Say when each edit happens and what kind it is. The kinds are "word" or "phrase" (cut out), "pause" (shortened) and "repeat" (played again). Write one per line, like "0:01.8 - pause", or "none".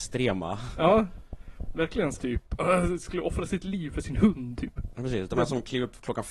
0:02.2 - word